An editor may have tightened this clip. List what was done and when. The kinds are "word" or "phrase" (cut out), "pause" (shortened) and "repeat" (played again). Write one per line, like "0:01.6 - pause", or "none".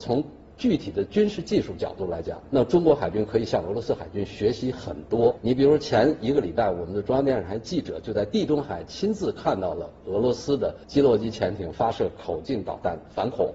0:10.8 - pause